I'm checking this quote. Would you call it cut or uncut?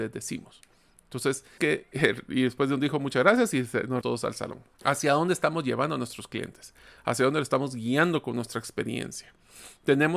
cut